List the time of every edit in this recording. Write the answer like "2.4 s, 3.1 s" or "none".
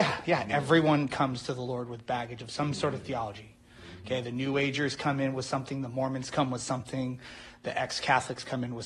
none

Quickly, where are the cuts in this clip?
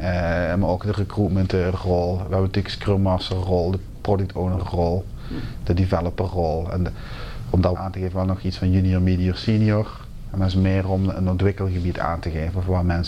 7.7 s

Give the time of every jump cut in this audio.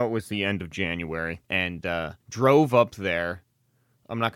1.4 s, 2.2 s

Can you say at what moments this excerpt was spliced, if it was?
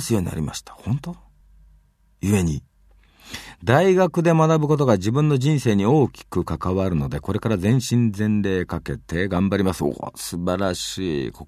none

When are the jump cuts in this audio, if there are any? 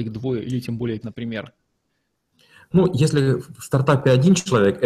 1.0 s

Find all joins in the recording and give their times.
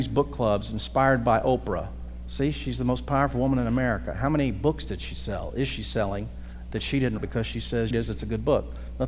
7.2 s, 7.9 s

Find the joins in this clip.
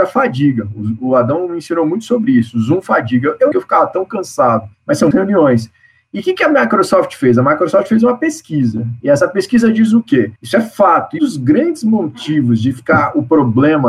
3.5 s, 4.7 s, 5.1 s, 10.4 s, 11.2 s

